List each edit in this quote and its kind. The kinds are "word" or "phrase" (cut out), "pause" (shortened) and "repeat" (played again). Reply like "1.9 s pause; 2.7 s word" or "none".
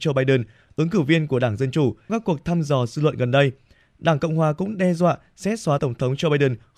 2.1 s word; 5.8 s word